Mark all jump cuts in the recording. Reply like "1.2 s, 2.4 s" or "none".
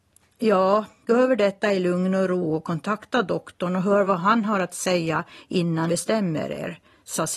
1.1 s, 5.9 s